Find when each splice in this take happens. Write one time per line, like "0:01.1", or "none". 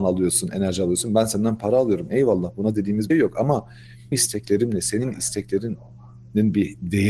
0:03.1
0:04.1